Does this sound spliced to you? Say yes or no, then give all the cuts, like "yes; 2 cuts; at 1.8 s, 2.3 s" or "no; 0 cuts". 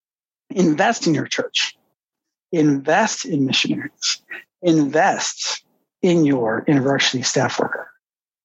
no; 0 cuts